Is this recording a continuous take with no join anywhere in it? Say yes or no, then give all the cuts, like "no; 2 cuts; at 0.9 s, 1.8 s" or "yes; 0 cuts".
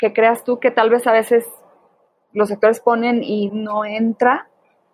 no; 1 cut; at 3.5 s